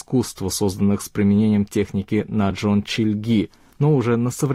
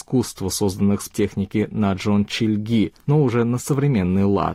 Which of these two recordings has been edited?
second; 2 cuts; at 1.1 s, 3.0 s

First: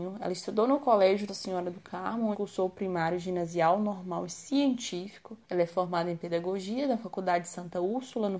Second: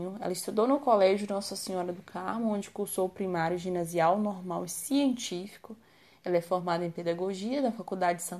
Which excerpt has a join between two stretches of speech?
first; 3 cuts; at 1.3 s, 2.3 s, 5.4 s

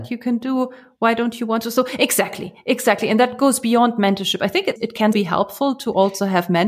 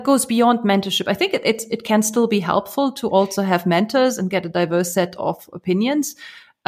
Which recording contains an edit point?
first; 2 cuts; at 4.8 s, 5.1 s

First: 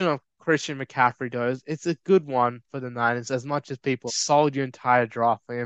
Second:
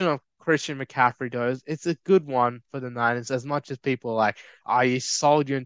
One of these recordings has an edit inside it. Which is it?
first; 1 cut; at 4.1 s

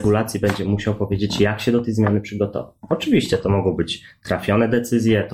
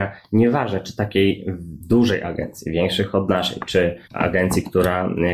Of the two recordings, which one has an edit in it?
second; 1 cut; at 4.0 s

